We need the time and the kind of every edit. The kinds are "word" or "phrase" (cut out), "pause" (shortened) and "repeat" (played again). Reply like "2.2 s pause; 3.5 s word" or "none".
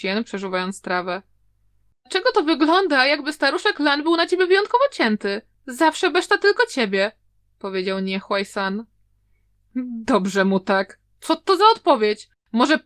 none